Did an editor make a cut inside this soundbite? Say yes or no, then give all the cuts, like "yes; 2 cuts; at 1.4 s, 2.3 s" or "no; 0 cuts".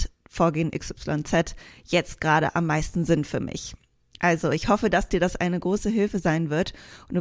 no; 0 cuts